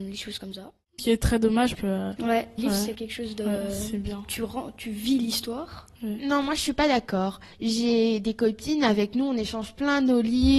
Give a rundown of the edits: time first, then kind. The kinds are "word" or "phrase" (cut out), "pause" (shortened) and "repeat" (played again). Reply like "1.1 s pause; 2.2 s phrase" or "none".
1.0 s word; 1.7 s word; 2.6 s word; 2.9 s word